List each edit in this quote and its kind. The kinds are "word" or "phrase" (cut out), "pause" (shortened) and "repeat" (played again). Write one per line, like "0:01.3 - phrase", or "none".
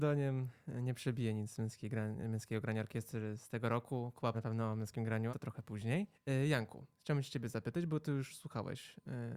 0:04.3 - word
0:05.3 - word
0:06.1 - pause